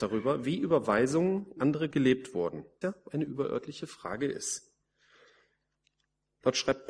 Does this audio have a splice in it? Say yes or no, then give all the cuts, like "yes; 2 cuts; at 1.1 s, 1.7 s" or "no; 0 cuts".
yes; 3 cuts; at 1.6 s, 1.9 s, 2.8 s